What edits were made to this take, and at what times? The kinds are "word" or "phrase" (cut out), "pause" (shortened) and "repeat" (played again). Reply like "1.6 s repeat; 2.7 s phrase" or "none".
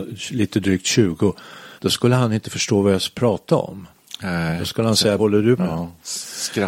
1.8 s pause; 5.2 s phrase; 5.6 s word